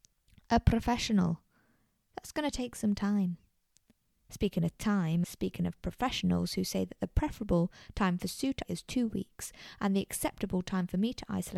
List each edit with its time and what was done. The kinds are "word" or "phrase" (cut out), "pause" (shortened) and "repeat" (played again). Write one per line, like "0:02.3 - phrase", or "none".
0:05.2 - word
0:08.6 - word